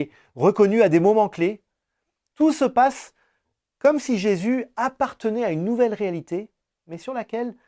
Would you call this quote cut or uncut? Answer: uncut